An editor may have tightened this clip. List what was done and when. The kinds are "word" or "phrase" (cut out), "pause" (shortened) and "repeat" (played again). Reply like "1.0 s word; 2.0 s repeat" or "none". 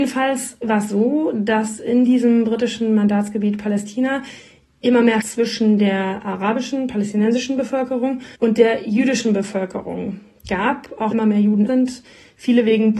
1.8 s word; 5.2 s word; 8.3 s pause; 11.1 s word; 11.7 s word